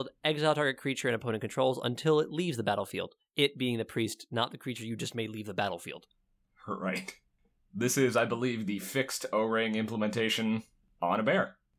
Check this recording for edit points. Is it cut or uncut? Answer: uncut